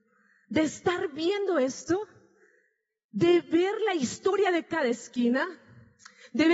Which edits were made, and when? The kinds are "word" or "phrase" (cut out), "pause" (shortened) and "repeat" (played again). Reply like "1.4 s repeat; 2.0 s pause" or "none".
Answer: none